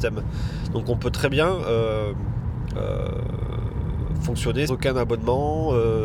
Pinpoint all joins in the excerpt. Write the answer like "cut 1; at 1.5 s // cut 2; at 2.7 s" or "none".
cut 1; at 4.7 s

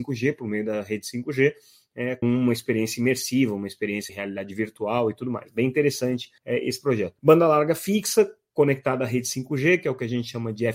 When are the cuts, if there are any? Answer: cut 1; at 2.2 s // cut 2; at 4.1 s // cut 3; at 6.4 s // cut 4; at 7.2 s

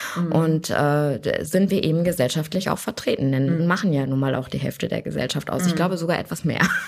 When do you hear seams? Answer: cut 1; at 1.5 s // cut 2; at 3.6 s

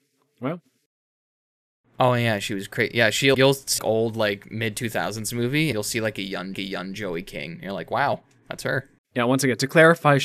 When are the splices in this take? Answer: cut 1; at 3.3 s // cut 2; at 3.8 s // cut 3; at 5.7 s // cut 4; at 6.5 s // cut 5; at 9.0 s

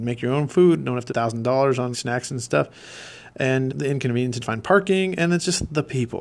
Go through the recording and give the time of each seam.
cut 1; at 1.1 s // cut 2; at 1.9 s // cut 3; at 3.7 s // cut 4; at 4.4 s

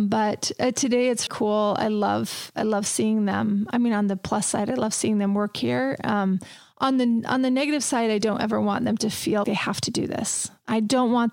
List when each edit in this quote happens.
cut 1; at 1.3 s // cut 2; at 9.4 s

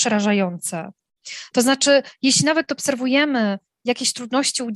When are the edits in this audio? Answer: none

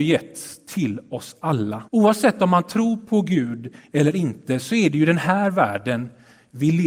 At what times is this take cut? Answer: cut 1; at 1.9 s

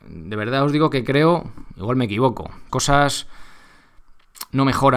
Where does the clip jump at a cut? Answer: cut 1; at 2.7 s

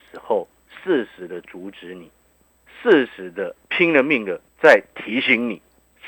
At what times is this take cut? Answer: cut 1; at 3.6 s // cut 2; at 4.5 s

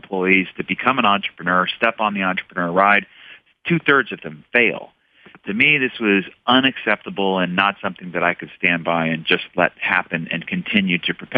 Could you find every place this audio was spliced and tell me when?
none

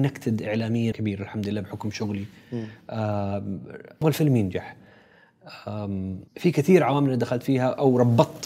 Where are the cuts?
cut 1; at 0.9 s // cut 2; at 4.0 s // cut 3; at 6.3 s

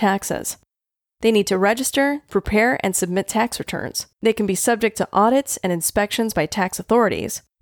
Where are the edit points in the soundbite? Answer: cut 1; at 2.3 s // cut 2; at 4.1 s

